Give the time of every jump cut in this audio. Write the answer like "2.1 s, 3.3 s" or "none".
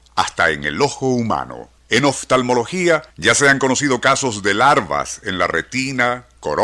1.8 s, 3.1 s